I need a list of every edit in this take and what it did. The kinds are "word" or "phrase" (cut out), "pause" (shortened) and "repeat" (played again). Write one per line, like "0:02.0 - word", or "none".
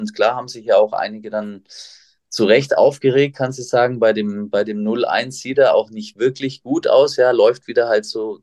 none